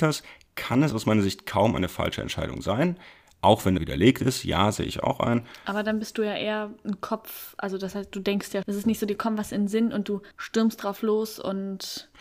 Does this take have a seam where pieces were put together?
yes; 3 cuts; at 3.8 s, 8.6 s, 10.3 s

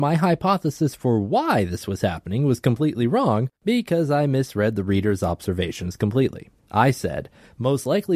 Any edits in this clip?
yes; 2 cuts; at 3.6 s, 6.6 s

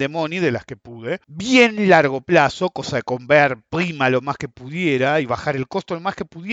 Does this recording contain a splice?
yes; 1 cut; at 1.2 s

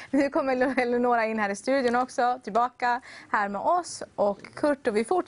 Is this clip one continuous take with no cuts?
yes; 0 cuts

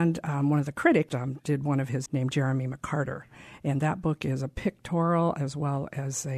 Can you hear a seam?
yes; 2 cuts; at 1.1 s, 2.1 s

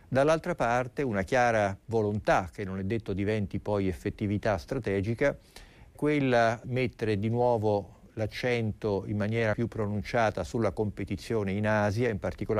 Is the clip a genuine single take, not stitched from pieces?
no; 4 cuts; at 1.8 s, 6.0 s, 6.6 s, 9.5 s

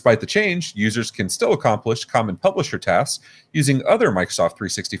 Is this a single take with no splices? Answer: yes; 0 cuts

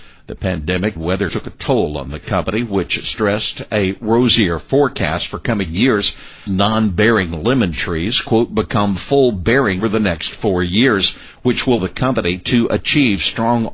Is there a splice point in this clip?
yes; 5 cuts; at 1.0 s, 1.3 s, 6.5 s, 9.8 s, 11.8 s

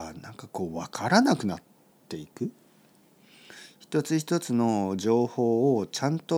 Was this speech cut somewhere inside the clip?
no; 0 cuts

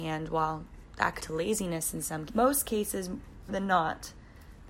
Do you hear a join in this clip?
yes; 3 cuts; at 1.2 s, 2.3 s, 3.5 s

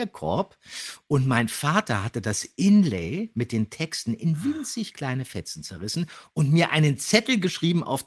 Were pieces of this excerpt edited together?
no; 0 cuts

